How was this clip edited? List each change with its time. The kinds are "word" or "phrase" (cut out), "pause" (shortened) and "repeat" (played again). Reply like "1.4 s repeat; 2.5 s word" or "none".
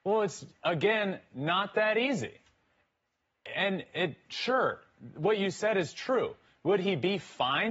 none